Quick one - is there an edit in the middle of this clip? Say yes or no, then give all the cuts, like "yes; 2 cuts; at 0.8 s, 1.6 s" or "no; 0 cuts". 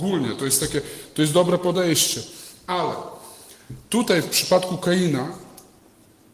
no; 0 cuts